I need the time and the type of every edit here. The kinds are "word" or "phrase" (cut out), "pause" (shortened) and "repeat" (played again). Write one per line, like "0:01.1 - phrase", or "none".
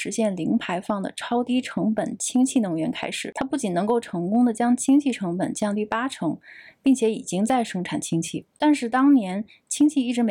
none